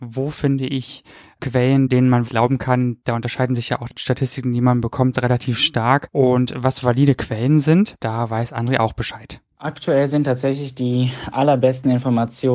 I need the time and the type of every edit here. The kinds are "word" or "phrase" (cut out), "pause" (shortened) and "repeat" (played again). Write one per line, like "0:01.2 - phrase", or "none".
0:02.2 - word